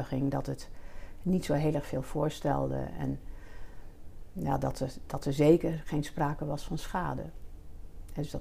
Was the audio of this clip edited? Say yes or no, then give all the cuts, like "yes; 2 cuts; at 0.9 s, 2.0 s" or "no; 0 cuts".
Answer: no; 0 cuts